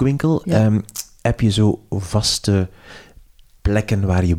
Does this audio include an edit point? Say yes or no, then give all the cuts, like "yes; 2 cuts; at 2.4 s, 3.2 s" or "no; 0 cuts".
no; 0 cuts